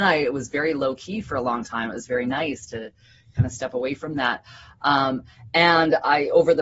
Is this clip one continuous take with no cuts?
yes; 0 cuts

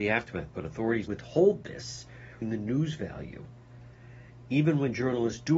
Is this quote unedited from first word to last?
no; 2 cuts; at 1.1 s, 2.4 s

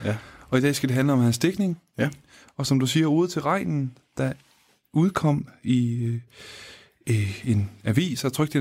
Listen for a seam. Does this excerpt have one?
no; 0 cuts

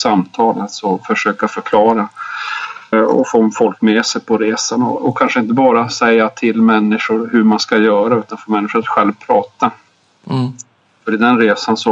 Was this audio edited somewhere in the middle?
yes; 1 cut; at 2.9 s

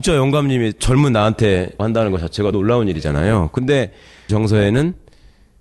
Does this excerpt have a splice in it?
yes; 3 cuts; at 1.8 s, 2.5 s, 4.3 s

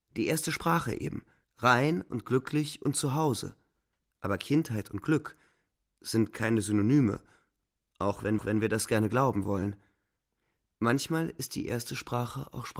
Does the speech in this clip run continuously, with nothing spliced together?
no; 3 cuts; at 1.4 s, 3.9 s, 8.4 s

